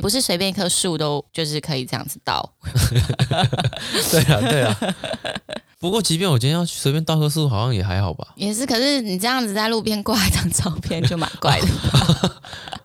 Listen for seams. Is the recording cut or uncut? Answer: cut